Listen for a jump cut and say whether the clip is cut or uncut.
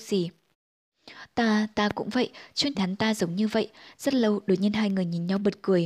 cut